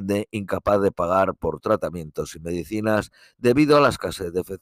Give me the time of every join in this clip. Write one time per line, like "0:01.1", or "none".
none